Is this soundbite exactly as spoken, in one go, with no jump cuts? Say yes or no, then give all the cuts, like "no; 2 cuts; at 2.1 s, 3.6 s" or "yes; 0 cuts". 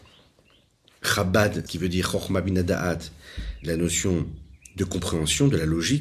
no; 2 cuts; at 1.7 s, 3.6 s